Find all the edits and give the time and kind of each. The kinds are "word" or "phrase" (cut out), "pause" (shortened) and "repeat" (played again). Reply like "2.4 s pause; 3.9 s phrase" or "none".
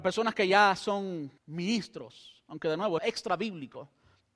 1.4 s pause; 3.0 s phrase

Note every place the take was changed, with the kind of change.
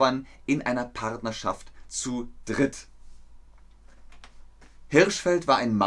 none

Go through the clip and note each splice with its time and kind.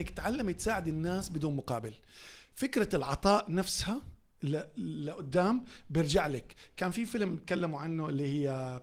none

